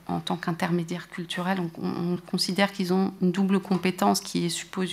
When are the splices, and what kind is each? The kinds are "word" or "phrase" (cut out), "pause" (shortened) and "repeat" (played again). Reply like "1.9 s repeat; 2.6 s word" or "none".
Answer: none